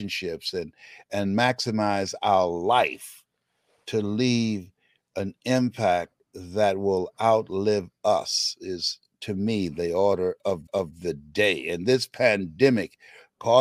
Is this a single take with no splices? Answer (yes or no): no